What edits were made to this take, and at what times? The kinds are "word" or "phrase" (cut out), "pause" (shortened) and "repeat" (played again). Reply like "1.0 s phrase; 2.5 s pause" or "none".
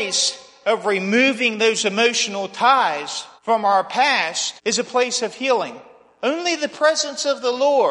3.4 s pause; 4.6 s pause